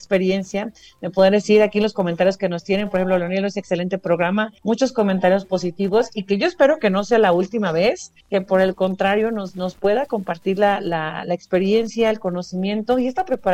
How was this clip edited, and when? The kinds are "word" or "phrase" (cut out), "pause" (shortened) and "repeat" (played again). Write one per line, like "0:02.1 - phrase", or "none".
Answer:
0:04.6 - pause
0:08.2 - pause